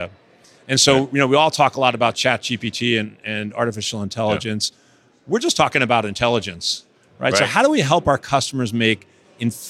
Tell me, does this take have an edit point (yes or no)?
no